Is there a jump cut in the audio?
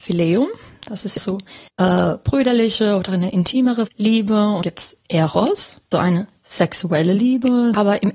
yes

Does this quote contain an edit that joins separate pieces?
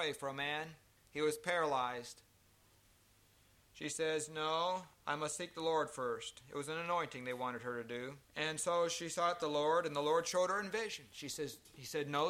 yes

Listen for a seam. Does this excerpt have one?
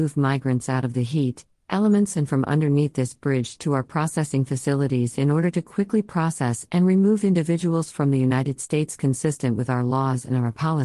no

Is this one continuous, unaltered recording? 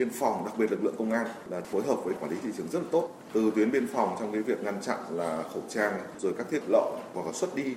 no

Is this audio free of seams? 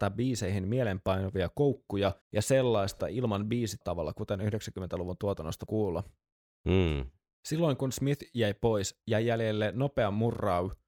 no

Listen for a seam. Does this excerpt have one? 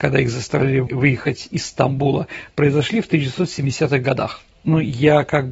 no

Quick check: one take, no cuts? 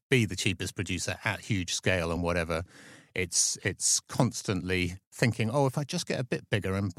yes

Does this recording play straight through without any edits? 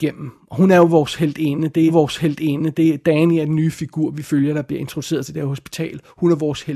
no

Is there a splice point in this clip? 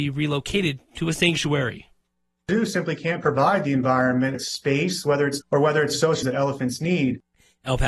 yes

